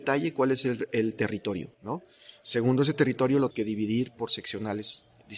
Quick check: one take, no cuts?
no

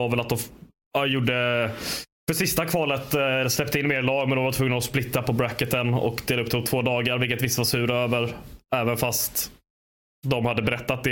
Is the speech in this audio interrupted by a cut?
no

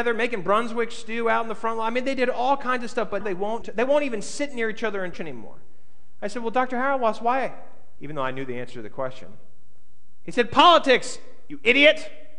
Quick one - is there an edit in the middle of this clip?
yes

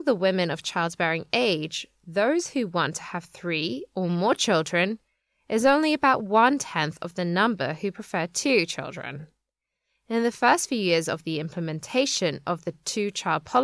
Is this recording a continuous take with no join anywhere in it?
yes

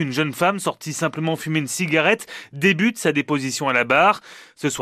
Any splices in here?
no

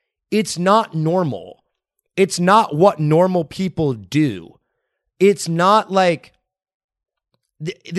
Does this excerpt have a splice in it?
no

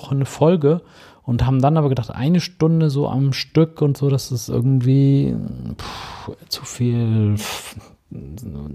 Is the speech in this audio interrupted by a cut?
no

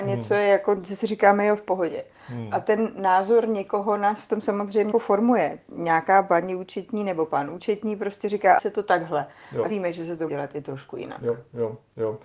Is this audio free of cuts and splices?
no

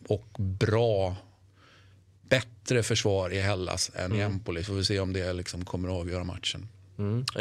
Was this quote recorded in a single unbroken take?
yes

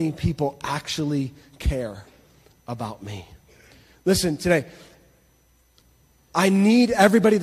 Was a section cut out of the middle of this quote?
no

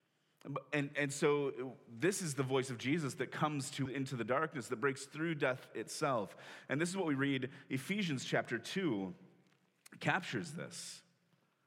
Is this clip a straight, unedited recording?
no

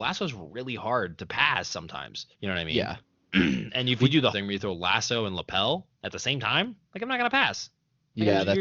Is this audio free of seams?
no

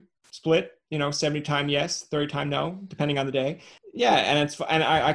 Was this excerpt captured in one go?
yes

